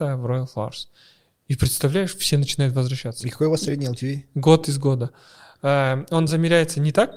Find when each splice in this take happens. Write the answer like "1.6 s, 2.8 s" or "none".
none